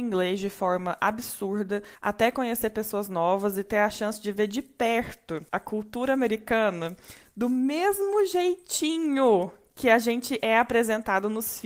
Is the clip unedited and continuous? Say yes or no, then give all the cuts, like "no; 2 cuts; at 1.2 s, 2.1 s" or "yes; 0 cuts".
no; 2 cuts; at 1.9 s, 5.5 s